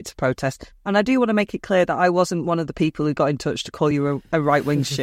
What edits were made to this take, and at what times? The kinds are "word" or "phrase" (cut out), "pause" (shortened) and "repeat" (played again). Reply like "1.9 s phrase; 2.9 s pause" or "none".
none